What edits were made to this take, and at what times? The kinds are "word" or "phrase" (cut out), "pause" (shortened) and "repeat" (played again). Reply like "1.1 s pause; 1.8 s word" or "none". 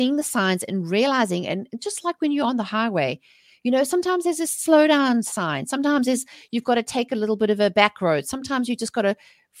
none